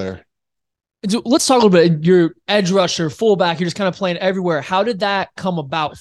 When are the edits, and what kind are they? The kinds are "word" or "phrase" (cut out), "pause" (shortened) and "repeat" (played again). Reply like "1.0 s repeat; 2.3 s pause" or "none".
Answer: none